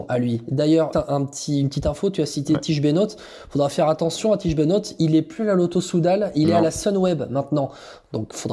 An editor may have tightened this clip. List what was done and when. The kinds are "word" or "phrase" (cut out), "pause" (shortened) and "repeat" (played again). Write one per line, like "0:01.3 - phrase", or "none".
0:00.9 - word